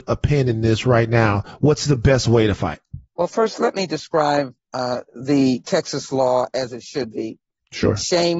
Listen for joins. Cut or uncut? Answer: cut